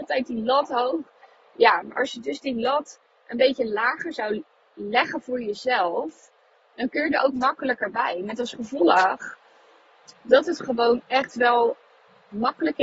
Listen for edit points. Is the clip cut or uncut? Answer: uncut